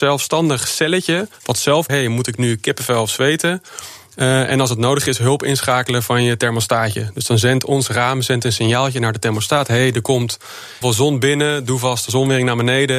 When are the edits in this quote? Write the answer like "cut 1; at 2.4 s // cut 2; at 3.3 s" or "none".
cut 1; at 1.3 s // cut 2; at 1.9 s // cut 3; at 10.8 s